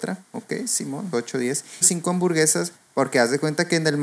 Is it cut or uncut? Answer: cut